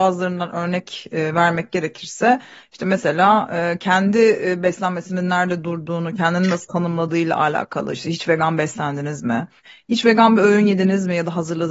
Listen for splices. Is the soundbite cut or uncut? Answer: uncut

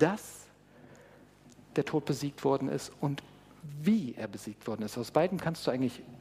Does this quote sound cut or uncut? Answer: uncut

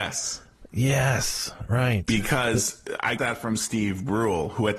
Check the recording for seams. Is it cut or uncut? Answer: cut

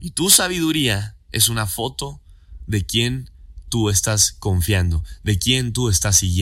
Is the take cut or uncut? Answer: uncut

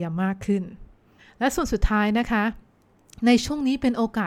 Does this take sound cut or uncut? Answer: cut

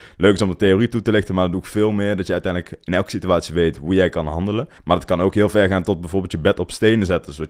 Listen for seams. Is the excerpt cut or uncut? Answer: cut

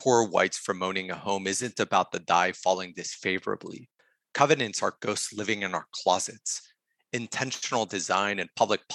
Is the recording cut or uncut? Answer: uncut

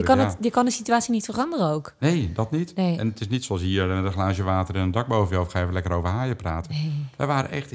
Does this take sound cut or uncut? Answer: uncut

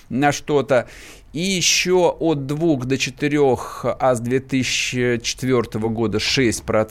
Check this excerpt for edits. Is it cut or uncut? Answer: uncut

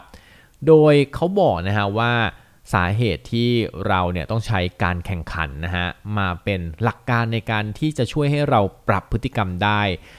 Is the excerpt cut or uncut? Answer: uncut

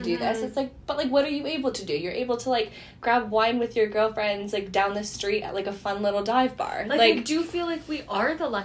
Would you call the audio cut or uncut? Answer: uncut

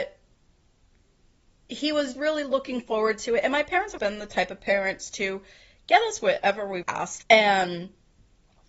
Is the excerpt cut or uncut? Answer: cut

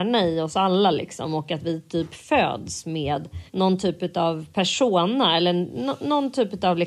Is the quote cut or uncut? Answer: cut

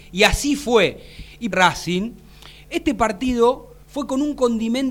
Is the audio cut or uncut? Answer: cut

